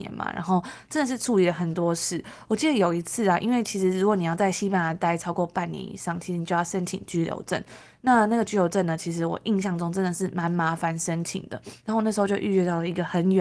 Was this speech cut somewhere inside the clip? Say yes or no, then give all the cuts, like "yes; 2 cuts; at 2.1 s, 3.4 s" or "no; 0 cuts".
no; 0 cuts